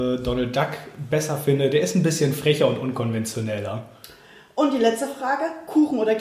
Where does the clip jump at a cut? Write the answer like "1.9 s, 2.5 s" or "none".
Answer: none